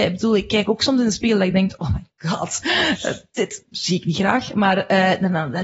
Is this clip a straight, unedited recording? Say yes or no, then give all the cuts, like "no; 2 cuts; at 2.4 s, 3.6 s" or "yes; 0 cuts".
yes; 0 cuts